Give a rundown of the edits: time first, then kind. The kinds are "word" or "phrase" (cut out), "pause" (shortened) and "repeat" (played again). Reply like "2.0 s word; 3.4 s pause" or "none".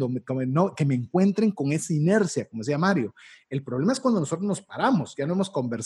none